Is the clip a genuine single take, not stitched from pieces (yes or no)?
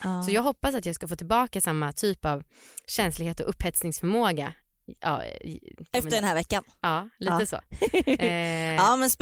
yes